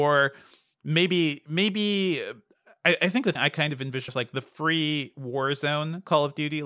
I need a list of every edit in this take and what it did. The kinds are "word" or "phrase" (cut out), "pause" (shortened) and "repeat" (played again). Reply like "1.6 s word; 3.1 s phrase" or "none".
3.4 s word; 4.1 s word